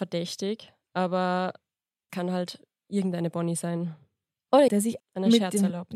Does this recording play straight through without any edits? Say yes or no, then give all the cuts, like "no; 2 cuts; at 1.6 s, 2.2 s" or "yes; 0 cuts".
no; 3 cuts; at 2.1 s, 4.7 s, 5.0 s